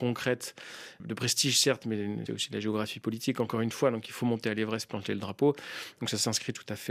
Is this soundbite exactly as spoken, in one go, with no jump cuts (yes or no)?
no